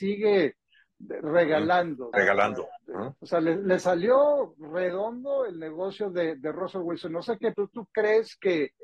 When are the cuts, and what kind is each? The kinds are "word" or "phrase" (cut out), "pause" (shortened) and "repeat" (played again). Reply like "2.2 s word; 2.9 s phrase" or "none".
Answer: 2.1 s word; 3.2 s pause; 7.5 s word